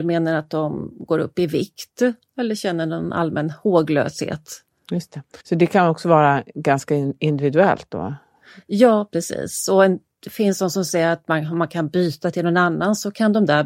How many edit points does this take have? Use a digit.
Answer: 1